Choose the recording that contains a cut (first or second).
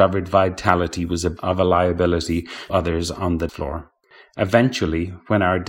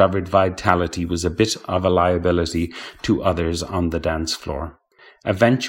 first